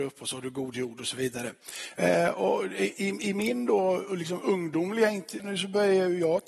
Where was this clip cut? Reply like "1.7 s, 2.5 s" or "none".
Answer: 5.4 s